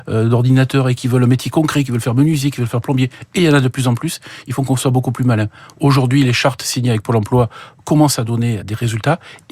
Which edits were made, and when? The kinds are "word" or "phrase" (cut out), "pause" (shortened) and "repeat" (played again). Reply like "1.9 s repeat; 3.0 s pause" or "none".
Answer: 8.6 s word